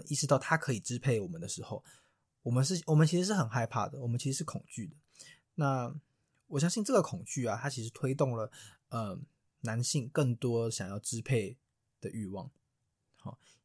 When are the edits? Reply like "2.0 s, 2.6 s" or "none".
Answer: none